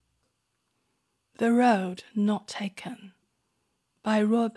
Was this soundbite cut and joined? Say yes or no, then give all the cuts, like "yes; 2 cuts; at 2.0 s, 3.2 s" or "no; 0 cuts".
no; 0 cuts